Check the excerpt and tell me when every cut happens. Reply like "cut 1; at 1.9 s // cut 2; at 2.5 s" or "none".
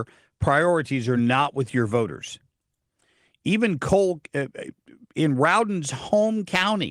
none